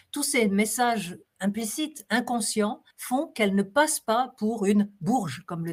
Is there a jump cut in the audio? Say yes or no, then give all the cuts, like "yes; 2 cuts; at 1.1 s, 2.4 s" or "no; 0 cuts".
yes; 1 cut; at 2.9 s